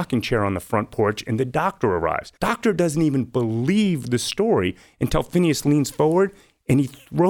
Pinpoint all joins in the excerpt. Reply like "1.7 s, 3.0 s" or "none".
2.4 s